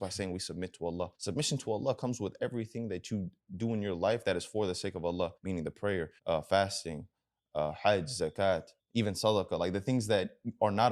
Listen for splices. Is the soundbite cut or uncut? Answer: cut